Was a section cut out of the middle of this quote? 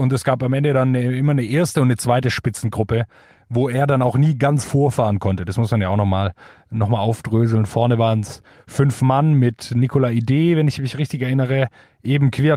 no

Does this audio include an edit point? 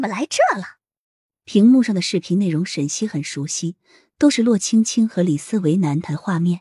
no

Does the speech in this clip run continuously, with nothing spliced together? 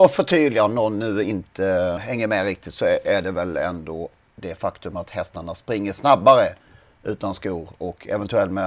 yes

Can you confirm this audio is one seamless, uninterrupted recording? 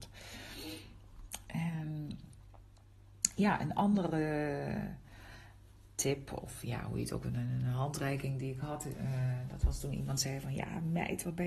yes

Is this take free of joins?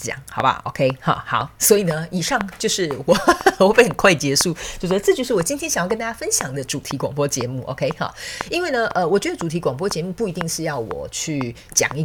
yes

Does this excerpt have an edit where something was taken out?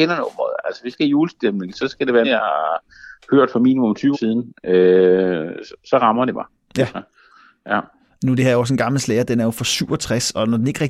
yes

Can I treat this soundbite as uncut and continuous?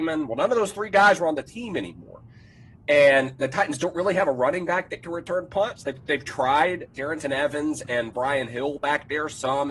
yes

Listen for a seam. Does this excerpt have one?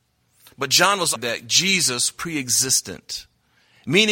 yes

